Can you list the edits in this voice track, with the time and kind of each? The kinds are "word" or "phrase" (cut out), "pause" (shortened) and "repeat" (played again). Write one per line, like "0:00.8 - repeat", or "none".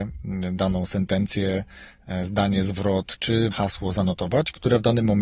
0:03.5 - word